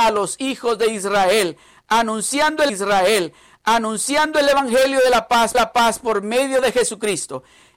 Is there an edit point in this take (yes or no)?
yes